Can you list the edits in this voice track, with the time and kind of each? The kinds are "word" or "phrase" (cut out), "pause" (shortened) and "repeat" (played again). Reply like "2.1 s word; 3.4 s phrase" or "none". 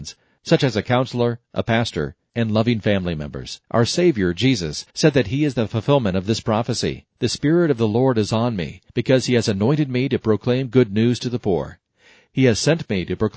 3.6 s pause; 4.9 s pause; 7.1 s pause; 8.9 s pause